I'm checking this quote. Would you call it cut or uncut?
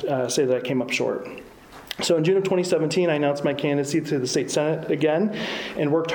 uncut